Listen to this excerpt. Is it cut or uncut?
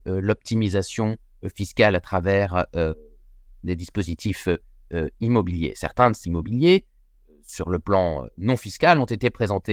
cut